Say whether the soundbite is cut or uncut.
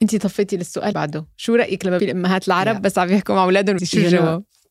cut